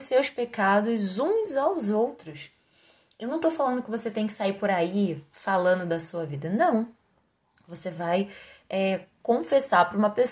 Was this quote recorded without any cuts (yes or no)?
yes